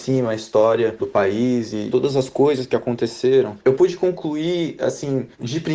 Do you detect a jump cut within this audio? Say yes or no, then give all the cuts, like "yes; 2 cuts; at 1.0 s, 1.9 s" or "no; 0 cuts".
no; 0 cuts